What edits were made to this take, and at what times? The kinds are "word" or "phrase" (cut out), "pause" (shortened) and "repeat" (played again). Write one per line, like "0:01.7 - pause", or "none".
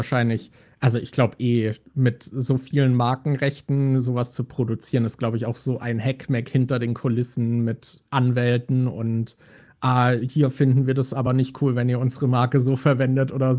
none